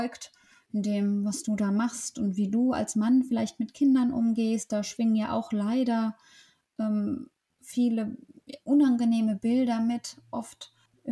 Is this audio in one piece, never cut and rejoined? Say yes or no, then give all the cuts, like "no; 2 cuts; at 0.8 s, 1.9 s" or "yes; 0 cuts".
yes; 0 cuts